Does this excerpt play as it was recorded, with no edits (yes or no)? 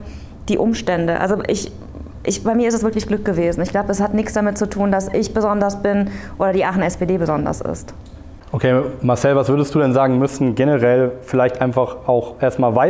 yes